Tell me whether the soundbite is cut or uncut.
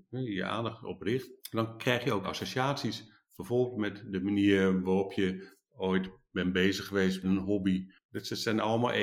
cut